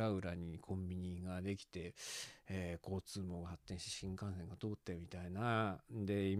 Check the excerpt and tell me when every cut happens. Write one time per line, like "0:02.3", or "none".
none